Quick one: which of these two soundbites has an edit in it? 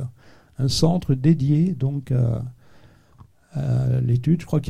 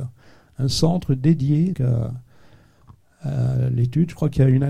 second; 1 cut; at 1.7 s

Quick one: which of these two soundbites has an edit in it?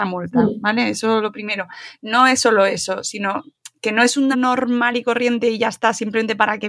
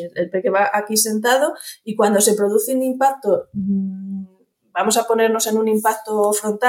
first; 1 cut; at 4.3 s

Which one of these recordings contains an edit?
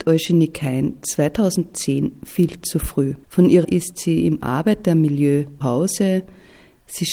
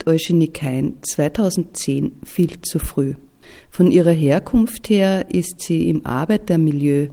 first; 3 cuts; at 3.2 s, 3.6 s, 5.6 s

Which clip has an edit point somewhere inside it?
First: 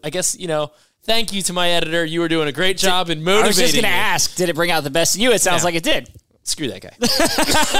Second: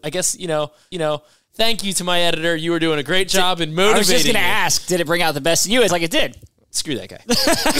second; 2 cuts; at 0.9 s, 5.9 s

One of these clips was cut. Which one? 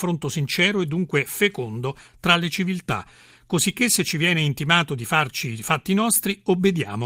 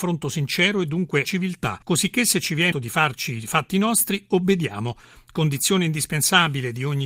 second; 3 cuts; at 1.2 s, 1.8 s, 2.7 s

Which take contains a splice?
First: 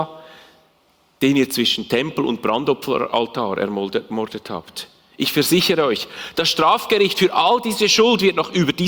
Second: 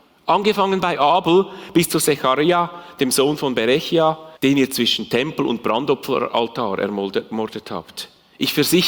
second; 1 cut; at 4.4 s

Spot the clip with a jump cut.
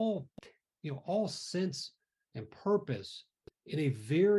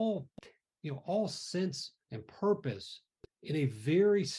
second; 1 cut; at 2.0 s

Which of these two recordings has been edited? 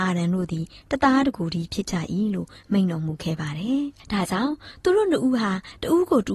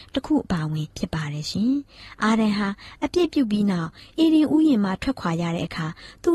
second; 1 cut; at 0.9 s

